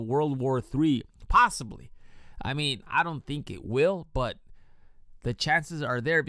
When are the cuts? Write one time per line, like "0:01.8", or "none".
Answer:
none